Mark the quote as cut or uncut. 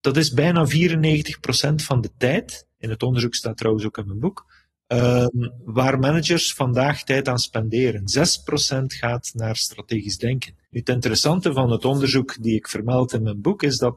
cut